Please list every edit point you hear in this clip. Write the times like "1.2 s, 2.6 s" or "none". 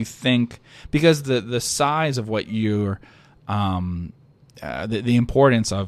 none